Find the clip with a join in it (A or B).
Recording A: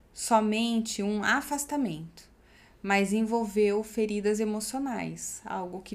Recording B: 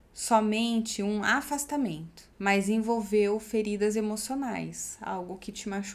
B